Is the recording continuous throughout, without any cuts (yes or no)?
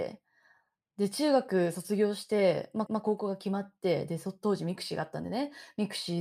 no